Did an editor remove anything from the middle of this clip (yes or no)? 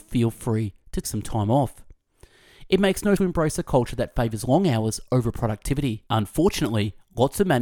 yes